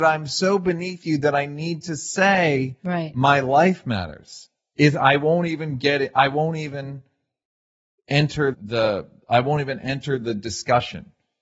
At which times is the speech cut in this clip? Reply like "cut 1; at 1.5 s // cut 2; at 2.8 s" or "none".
cut 1; at 8.5 s